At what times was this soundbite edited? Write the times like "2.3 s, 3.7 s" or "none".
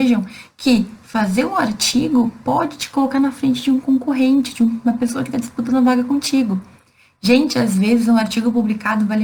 none